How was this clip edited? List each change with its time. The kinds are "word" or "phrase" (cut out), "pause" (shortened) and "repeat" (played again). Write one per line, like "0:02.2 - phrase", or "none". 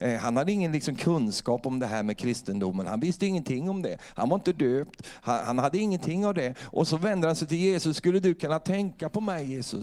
none